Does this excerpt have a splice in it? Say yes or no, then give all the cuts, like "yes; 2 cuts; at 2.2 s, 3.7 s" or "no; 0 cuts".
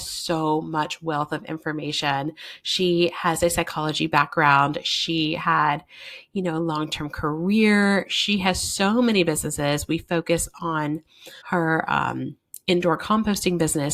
yes; 1 cut; at 11.4 s